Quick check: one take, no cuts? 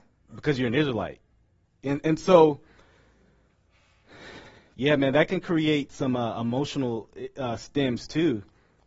yes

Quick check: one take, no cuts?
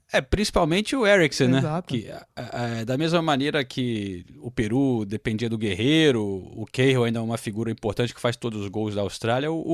no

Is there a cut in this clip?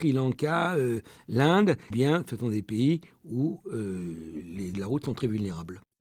yes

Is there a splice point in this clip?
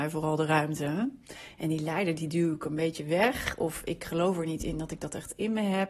no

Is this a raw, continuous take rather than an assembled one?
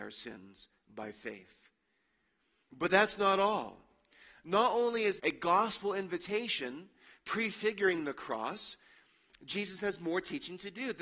no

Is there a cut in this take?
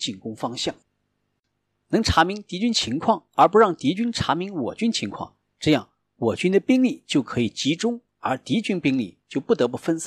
no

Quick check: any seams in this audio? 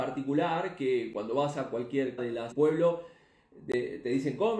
yes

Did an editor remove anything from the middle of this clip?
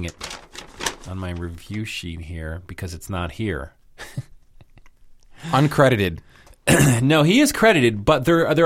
no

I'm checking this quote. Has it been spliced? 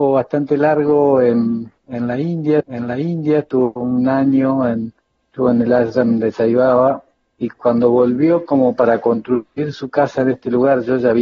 yes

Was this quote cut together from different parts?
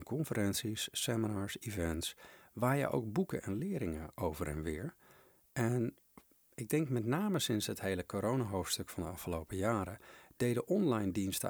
no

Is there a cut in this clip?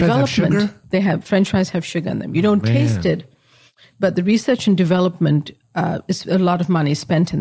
no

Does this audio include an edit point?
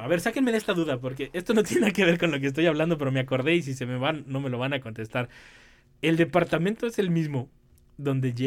no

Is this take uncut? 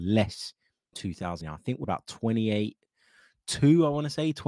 no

